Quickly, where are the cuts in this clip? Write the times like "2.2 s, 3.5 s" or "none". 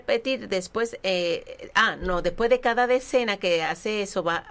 none